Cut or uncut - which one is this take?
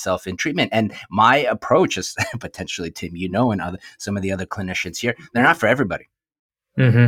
uncut